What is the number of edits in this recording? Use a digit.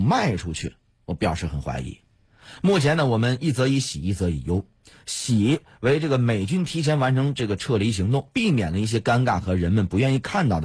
0